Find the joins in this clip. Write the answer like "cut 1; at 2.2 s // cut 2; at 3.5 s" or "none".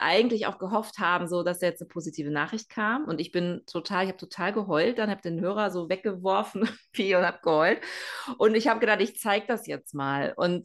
none